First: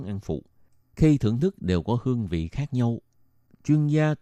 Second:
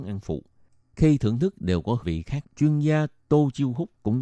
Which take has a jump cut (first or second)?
second